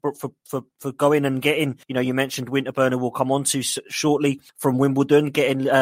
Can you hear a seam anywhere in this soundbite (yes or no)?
yes